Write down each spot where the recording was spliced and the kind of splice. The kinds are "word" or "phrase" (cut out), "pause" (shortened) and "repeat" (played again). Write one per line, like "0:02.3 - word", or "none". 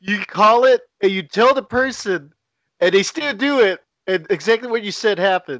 none